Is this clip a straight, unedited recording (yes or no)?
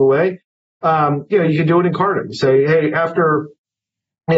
yes